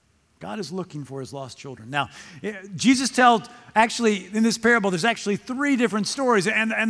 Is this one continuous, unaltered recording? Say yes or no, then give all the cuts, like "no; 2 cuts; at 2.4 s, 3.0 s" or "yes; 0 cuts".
yes; 0 cuts